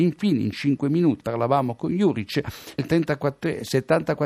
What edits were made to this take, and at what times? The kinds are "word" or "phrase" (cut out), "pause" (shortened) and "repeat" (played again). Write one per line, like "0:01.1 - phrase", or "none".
0:01.2 - word
0:02.8 - word